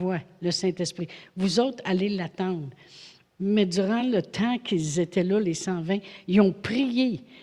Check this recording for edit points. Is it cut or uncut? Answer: uncut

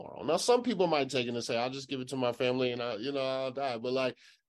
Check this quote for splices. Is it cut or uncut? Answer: uncut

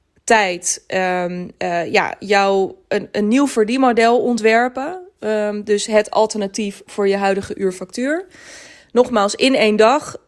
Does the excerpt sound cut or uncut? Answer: uncut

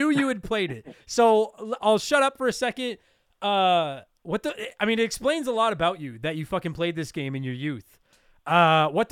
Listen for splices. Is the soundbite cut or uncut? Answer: cut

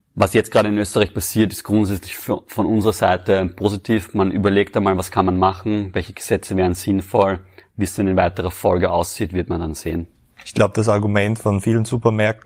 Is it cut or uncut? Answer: uncut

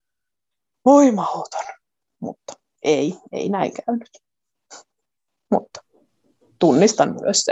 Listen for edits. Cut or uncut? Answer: uncut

